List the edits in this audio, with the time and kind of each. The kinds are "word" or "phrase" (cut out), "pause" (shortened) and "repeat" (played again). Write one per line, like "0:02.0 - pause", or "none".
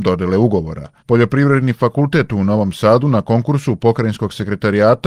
0:01.0 - pause